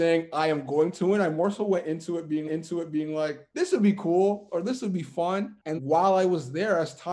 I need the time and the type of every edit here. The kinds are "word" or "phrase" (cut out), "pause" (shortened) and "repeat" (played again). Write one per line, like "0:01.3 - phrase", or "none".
0:02.5 - repeat
0:05.8 - word